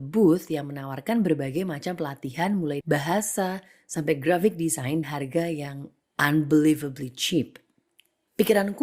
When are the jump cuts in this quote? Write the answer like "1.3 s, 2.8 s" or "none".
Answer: 2.8 s, 5.0 s, 6.0 s

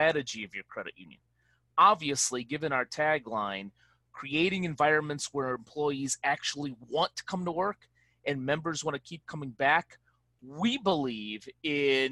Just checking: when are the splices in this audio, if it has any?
none

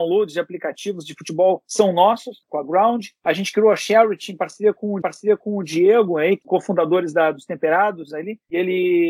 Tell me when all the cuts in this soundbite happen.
2.4 s, 5.0 s, 6.4 s

